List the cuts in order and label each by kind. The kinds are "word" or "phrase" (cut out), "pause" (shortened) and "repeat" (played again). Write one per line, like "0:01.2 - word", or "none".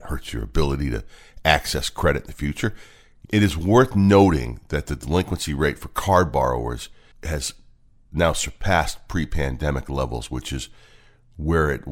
none